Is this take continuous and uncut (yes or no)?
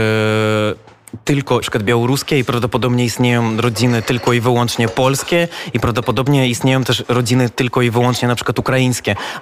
no